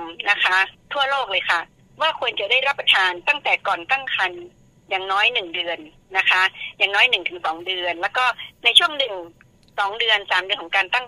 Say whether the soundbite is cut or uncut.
uncut